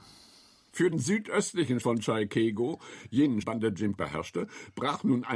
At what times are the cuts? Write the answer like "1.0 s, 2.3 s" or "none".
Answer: 0.9 s, 1.8 s, 3.4 s, 4.0 s